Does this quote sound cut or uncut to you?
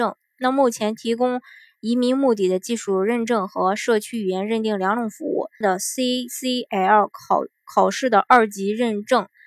cut